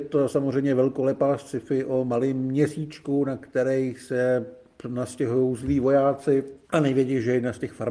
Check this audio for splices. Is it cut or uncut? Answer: cut